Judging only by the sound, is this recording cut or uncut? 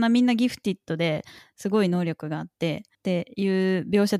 uncut